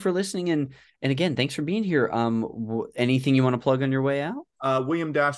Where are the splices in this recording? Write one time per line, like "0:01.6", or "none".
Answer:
none